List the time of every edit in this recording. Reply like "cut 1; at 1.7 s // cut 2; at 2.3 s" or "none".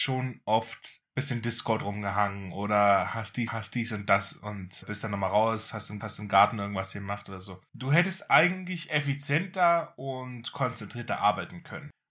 cut 1; at 1.0 s // cut 2; at 3.5 s // cut 3; at 4.8 s // cut 4; at 6.0 s